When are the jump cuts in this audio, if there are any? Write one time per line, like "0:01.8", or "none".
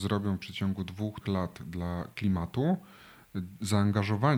0:01.2